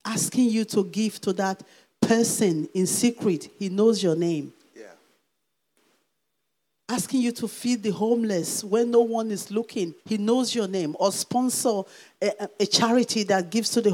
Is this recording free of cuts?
no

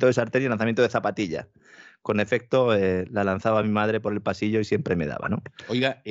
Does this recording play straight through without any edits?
yes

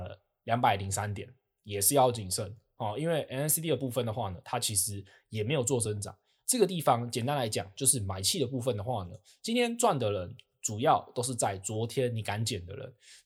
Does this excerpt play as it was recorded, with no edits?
yes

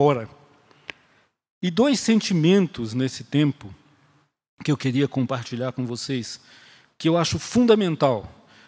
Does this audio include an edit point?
no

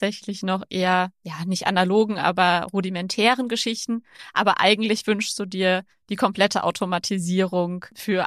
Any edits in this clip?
no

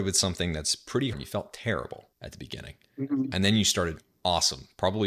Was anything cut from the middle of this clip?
yes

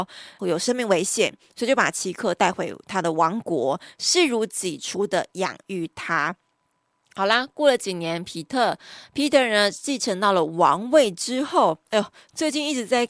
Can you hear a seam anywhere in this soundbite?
no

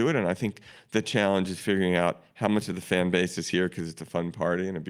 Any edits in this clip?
no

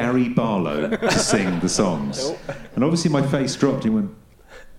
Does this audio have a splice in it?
no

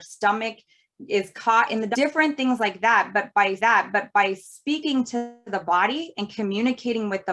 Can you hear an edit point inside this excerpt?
yes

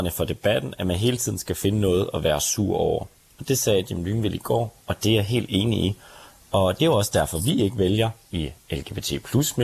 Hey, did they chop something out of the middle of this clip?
no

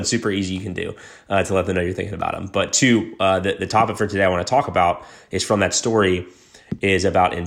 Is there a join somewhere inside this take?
no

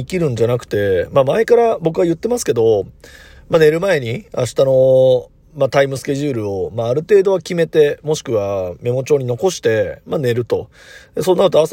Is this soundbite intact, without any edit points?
yes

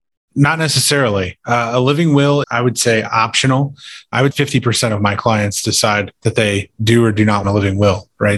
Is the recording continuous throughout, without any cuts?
no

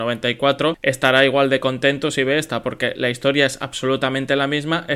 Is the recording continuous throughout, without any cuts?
yes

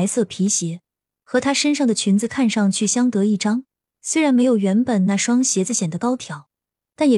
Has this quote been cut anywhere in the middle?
no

